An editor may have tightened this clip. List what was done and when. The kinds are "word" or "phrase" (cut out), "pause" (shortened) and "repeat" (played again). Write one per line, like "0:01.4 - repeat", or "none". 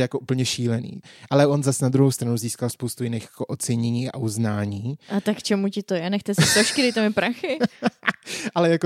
none